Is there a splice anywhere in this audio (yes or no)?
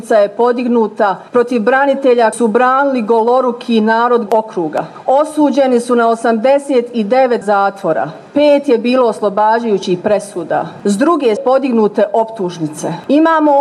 yes